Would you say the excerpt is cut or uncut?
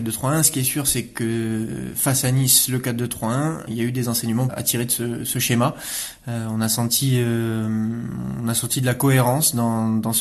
cut